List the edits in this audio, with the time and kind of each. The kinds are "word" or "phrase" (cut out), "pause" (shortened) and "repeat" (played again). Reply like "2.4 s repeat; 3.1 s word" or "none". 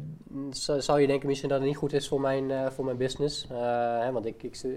none